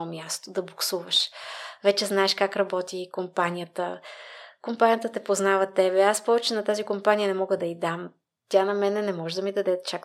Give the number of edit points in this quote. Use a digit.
0